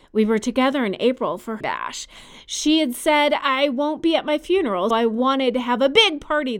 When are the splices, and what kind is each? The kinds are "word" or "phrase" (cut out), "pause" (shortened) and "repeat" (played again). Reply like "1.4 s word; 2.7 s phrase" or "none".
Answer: 1.6 s phrase; 4.9 s word

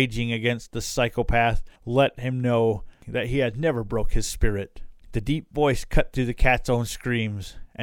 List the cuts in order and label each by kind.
1.8 s pause; 5.0 s pause

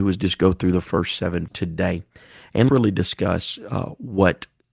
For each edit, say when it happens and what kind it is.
1.5 s word; 2.7 s word

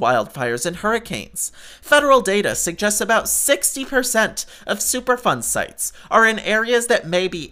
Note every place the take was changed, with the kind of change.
none

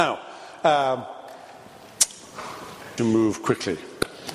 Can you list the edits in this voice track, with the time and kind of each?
3.0 s phrase

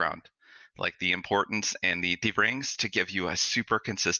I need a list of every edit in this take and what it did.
2.3 s phrase; 2.8 s word

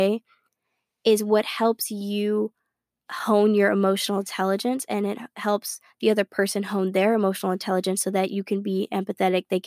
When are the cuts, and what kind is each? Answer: none

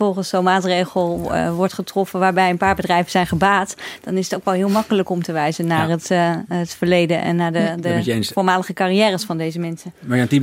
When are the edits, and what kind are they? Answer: none

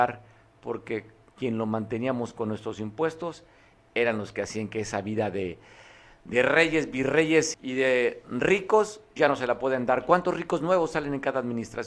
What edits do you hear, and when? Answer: 7.5 s word; 9.2 s word

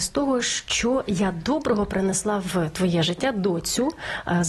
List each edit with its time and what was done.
none

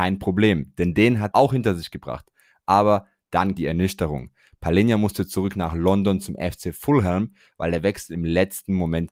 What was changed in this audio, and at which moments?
1.3 s word; 3.6 s word

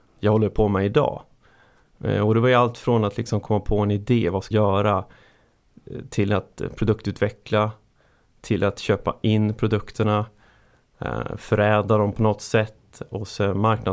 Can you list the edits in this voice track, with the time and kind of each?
4.5 s word

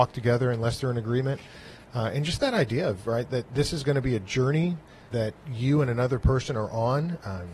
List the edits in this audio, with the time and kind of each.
5.1 s word

